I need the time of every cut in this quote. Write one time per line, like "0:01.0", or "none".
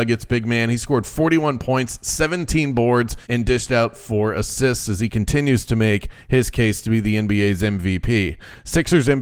0:03.2